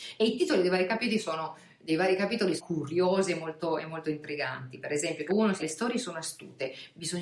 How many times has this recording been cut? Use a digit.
3